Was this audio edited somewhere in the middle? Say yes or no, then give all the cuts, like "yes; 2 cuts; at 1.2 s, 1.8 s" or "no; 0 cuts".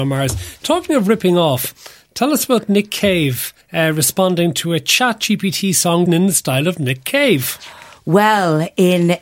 yes; 2 cuts; at 3.6 s, 6.1 s